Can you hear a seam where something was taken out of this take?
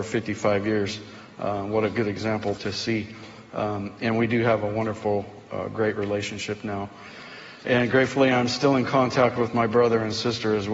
yes; 1 cut; at 2.6 s

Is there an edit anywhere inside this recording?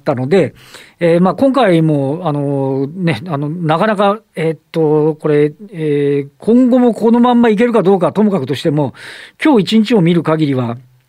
no; 0 cuts

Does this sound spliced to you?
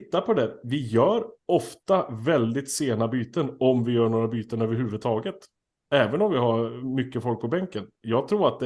no; 0 cuts

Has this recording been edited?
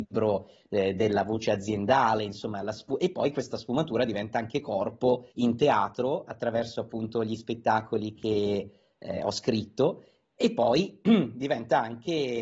yes; 1 cut; at 5.3 s

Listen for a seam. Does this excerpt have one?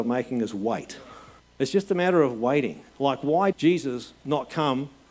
yes; 3 cuts; at 1.4 s, 2.9 s, 3.5 s

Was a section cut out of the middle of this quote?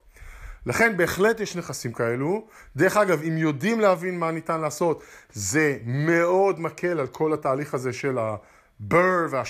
no; 0 cuts

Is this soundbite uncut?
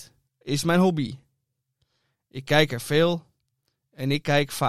yes; 0 cuts

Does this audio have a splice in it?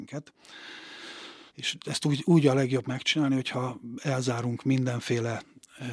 yes; 1 cut; at 1.5 s

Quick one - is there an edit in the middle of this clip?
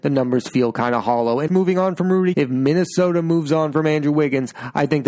yes; 2 cuts; at 1.5 s, 2.3 s

